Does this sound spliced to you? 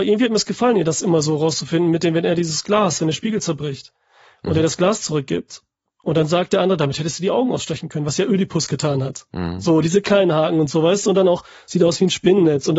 no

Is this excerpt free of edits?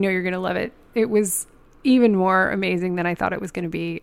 yes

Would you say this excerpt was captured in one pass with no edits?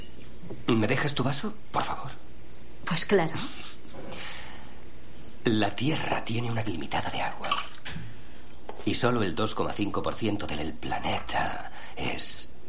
no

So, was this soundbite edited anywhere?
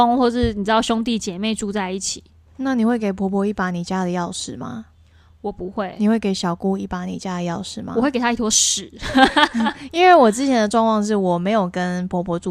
no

